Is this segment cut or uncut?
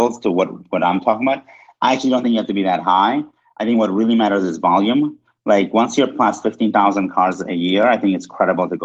uncut